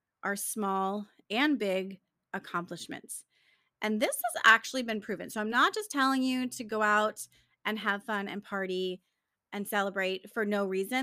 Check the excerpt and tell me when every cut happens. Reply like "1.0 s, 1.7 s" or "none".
none